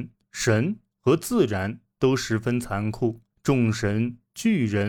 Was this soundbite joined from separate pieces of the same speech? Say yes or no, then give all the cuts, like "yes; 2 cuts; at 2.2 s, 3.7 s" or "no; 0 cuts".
yes; 1 cut; at 3.3 s